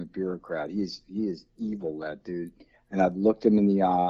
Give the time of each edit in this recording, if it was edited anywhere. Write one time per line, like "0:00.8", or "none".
none